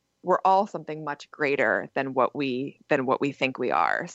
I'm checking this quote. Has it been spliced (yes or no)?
no